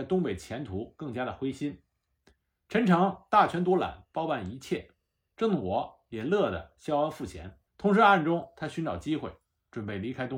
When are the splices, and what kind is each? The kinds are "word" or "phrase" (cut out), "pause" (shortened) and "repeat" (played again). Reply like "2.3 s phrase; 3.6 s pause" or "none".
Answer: 7.7 s pause